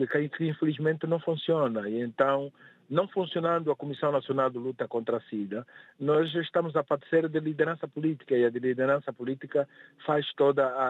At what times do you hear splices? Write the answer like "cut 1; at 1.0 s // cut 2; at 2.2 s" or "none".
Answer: none